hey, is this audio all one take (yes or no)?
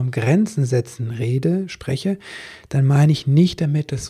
yes